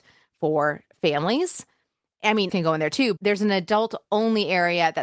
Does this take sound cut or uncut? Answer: cut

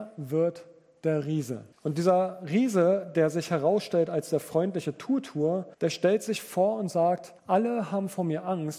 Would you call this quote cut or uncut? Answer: cut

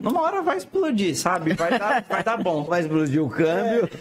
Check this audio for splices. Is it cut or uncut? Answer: cut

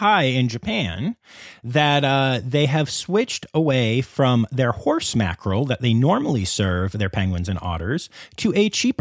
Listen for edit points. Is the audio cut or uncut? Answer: uncut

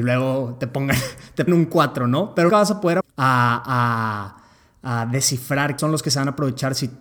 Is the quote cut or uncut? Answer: cut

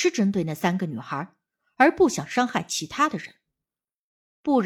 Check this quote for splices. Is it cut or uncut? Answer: uncut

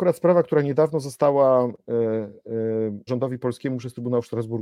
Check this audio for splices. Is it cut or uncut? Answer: cut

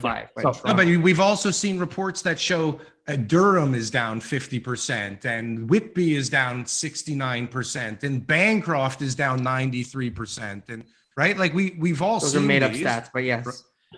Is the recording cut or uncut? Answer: uncut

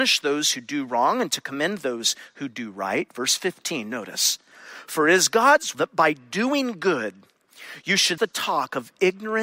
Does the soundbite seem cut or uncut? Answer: cut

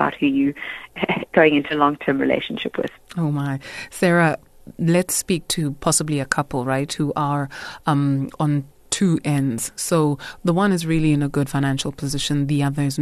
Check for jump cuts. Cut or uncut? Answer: uncut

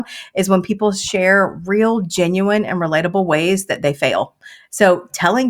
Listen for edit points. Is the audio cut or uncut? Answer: uncut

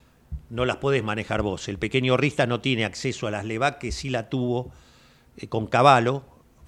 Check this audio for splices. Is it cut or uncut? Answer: uncut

